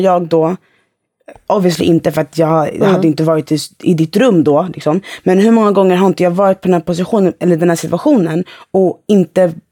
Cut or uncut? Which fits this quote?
uncut